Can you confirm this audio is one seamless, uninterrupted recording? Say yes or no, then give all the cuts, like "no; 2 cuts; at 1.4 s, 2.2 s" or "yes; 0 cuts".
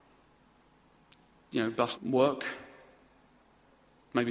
no; 1 cut; at 1.9 s